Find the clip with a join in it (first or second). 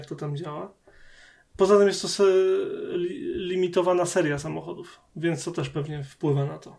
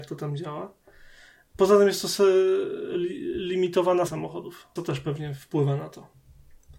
second